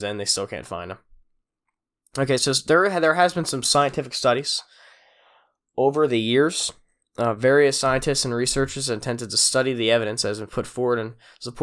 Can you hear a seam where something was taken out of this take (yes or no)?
no